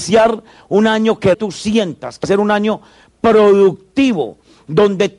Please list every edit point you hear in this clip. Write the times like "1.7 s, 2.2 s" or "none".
1.3 s, 2.2 s